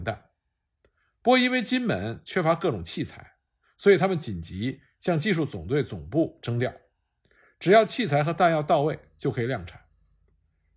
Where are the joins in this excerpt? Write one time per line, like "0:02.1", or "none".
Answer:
none